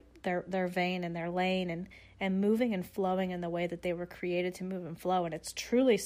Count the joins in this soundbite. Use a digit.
0